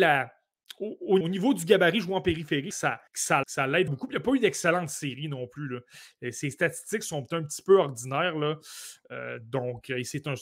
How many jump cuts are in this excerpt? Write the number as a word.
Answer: five